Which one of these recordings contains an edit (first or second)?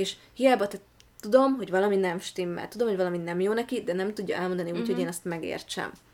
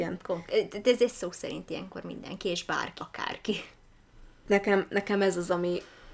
second